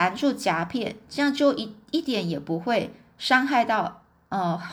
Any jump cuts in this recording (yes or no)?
no